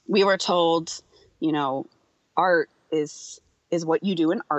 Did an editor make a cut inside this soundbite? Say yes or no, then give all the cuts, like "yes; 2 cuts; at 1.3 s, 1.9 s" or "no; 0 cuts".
no; 0 cuts